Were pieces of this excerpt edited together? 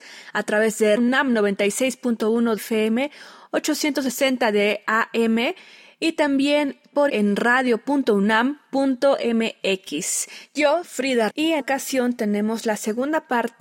yes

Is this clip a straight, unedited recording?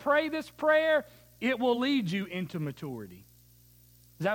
yes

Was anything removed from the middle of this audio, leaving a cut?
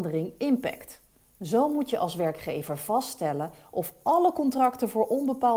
yes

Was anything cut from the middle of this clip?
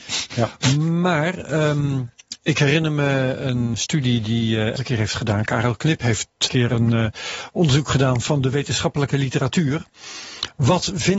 yes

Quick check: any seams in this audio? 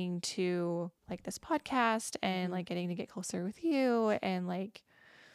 yes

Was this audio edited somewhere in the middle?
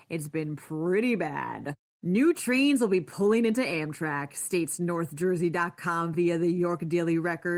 no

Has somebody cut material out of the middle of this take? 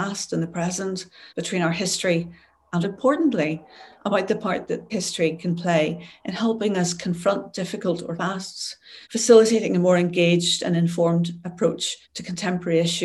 yes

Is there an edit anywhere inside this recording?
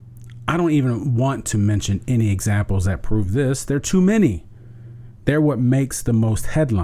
no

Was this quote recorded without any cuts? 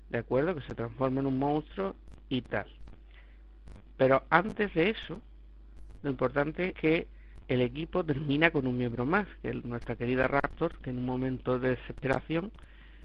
no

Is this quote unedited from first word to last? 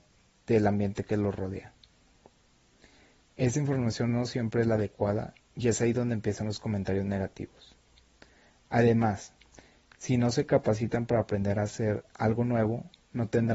yes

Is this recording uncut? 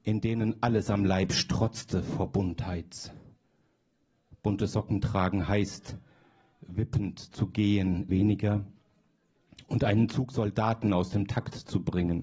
no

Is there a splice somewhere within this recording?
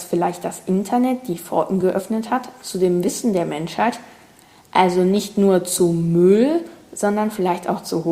no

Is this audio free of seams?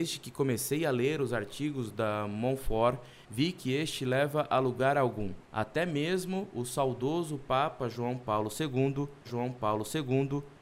no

